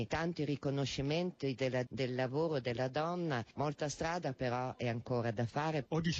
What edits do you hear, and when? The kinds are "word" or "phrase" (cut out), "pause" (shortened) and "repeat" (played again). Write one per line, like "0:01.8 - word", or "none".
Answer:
0:01.9 - word